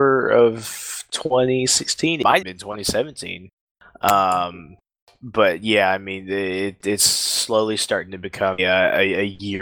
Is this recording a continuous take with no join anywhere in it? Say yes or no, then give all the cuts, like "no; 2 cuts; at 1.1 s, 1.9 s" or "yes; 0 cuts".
no; 2 cuts; at 2.4 s, 8.6 s